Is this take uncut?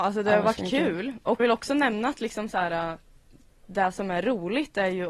no; 1 cut; at 1.4 s

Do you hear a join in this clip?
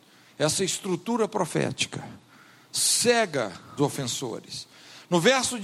yes; 1 cut; at 3.8 s

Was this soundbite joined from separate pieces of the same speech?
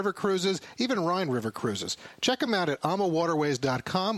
no; 0 cuts

